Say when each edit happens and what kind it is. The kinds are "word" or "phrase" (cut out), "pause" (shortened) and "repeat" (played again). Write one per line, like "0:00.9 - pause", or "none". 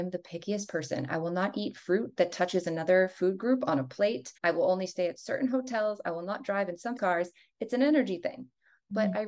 0:04.4 - pause
0:07.0 - word